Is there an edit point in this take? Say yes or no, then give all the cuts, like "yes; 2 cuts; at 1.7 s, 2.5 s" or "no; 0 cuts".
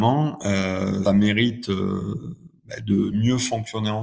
yes; 2 cuts; at 1.1 s, 3.1 s